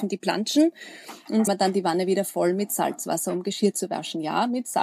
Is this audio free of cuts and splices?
no; 1 cut; at 1.5 s

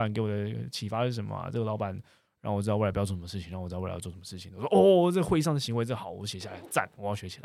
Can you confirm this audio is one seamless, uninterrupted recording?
yes; 0 cuts

